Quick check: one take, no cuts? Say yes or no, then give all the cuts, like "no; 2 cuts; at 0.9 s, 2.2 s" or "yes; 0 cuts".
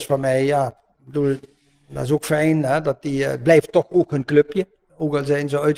yes; 0 cuts